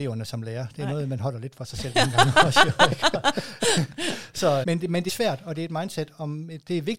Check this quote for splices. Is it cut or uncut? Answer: cut